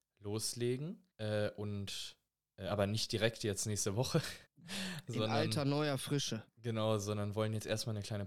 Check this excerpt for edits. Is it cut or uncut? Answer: cut